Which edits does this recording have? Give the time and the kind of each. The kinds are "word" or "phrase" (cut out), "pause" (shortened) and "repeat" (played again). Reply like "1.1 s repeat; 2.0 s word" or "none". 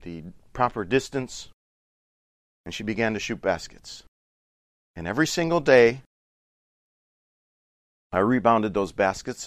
none